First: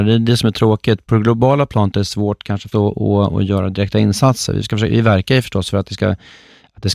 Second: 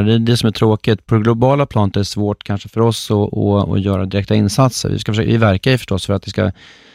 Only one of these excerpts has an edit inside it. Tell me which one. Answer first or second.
first